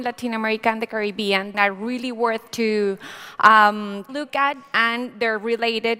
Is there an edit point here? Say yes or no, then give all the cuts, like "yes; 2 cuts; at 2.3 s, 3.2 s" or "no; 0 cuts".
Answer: yes; 3 cuts; at 1.5 s, 2.5 s, 4.1 s